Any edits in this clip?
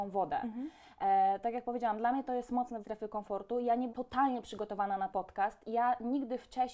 yes; 3 cuts; at 2.8 s, 3.9 s, 5.1 s

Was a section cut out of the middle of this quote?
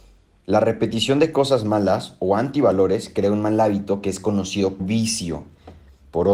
yes; 1 cut; at 4.8 s

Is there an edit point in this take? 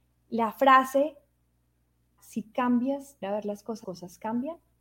yes; 3 cuts; at 2.2 s, 3.2 s, 3.8 s

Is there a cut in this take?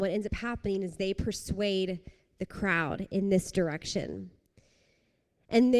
no; 0 cuts

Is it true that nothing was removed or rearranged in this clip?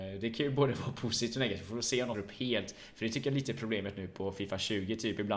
no; 1 cut; at 2.1 s

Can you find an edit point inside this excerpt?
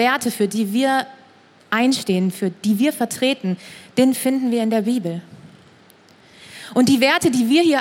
no; 0 cuts

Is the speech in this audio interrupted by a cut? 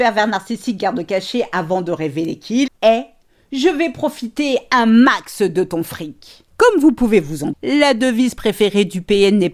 yes; 2 cuts; at 2.7 s, 7.5 s

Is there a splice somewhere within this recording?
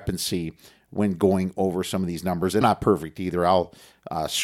yes; 1 cut; at 2.6 s

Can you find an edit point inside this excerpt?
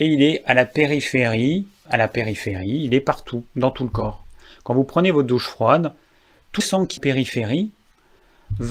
yes; 3 cuts; at 1.8 s, 6.6 s, 7.0 s

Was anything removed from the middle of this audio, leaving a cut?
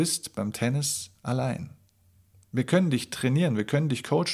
no; 0 cuts

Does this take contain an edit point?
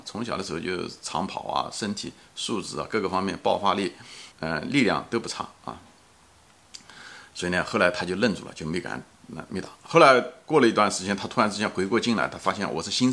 yes; 1 cut; at 4.3 s

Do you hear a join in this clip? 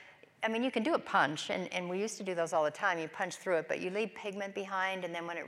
no; 0 cuts

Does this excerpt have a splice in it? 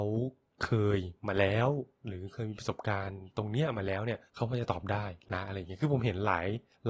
yes; 1 cut; at 4.3 s

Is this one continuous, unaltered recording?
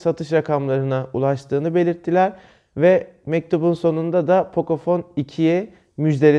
yes; 0 cuts

